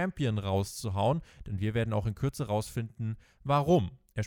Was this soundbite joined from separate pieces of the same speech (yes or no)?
no